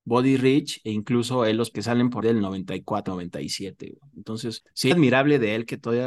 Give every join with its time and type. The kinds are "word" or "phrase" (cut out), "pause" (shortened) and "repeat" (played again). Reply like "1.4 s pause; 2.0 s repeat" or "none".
1.7 s word; 2.2 s word; 3.1 s word; 4.9 s word